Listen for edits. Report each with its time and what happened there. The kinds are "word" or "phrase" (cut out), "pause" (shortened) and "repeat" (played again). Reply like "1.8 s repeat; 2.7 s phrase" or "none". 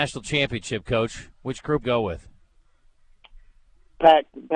1.8 s phrase